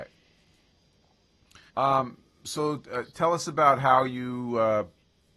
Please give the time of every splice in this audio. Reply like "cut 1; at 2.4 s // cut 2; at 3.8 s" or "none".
cut 1; at 1.7 s